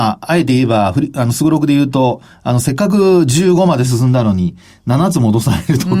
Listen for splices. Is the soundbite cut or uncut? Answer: uncut